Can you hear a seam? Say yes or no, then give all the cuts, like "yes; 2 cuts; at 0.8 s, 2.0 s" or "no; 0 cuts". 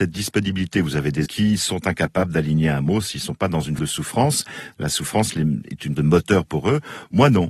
yes; 3 cuts; at 1.3 s, 3.8 s, 5.9 s